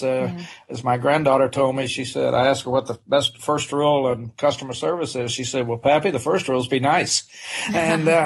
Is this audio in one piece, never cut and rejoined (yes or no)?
yes